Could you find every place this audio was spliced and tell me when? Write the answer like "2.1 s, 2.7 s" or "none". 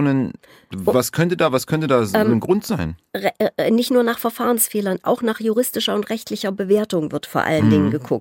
none